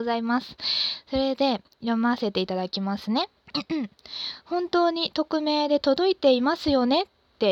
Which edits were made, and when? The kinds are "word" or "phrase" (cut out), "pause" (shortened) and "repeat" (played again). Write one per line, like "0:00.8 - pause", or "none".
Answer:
0:03.4 - pause